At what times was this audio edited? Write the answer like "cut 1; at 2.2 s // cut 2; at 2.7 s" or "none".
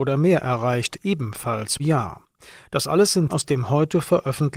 cut 1; at 1.8 s // cut 2; at 3.3 s